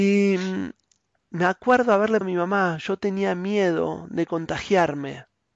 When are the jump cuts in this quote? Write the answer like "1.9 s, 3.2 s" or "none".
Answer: 2.2 s